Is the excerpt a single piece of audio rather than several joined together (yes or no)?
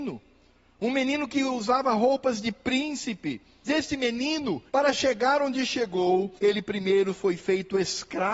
no